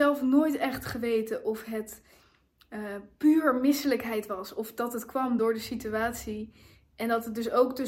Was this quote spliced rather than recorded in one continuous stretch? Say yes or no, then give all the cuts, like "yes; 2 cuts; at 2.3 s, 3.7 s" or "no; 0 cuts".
no; 0 cuts